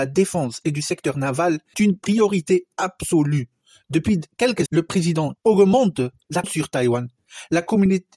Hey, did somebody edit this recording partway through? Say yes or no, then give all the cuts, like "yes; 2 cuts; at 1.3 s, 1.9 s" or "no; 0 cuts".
yes; 4 cuts; at 1.7 s, 4.7 s, 5.4 s, 6.4 s